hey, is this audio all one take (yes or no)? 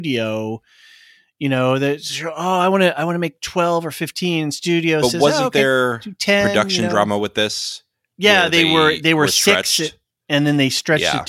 yes